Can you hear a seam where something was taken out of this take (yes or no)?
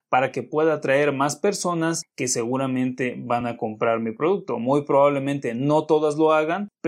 no